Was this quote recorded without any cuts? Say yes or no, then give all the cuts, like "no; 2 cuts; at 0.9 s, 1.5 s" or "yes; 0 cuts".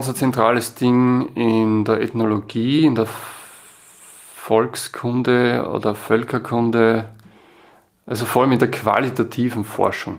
yes; 0 cuts